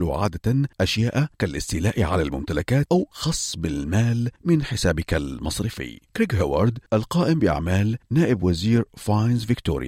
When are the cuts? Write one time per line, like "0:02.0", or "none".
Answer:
none